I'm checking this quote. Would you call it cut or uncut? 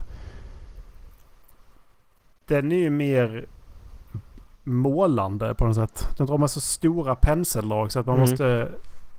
uncut